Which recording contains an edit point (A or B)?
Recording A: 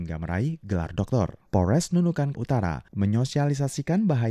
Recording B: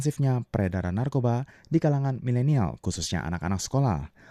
A